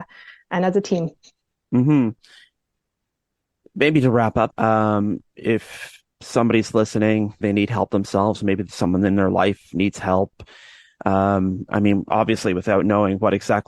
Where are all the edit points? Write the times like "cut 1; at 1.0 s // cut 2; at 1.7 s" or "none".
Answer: cut 1; at 4.5 s // cut 2; at 7.4 s